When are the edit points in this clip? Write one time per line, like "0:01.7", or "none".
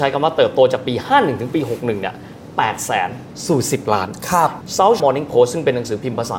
0:05.0

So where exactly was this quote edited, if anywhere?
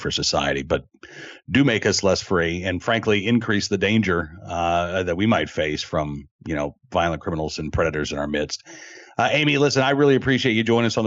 0:06.4

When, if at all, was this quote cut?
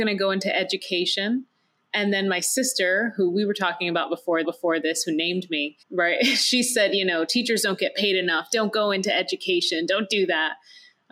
0:04.4
0:05.8

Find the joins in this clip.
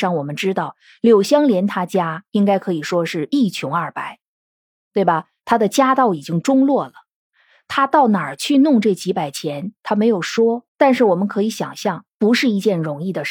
0:10.7

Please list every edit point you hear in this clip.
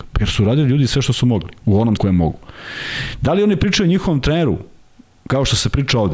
0:02.0

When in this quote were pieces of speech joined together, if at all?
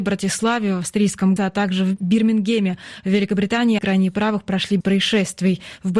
0:01.4
0:03.8
0:04.8

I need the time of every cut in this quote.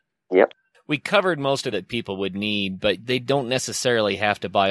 0:01.7

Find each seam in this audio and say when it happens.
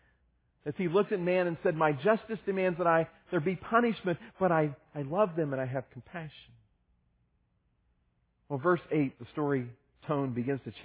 none

